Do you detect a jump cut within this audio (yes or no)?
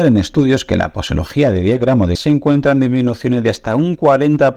yes